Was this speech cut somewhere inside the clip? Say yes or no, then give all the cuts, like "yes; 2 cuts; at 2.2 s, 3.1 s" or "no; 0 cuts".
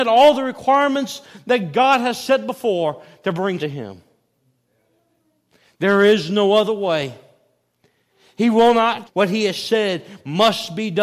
yes; 2 cuts; at 3.6 s, 9.0 s